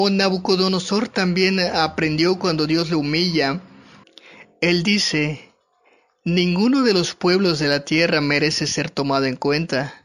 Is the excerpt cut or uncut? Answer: uncut